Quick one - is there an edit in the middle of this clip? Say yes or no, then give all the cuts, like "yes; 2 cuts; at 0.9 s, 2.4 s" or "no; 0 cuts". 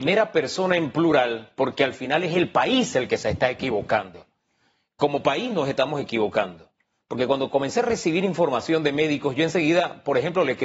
no; 0 cuts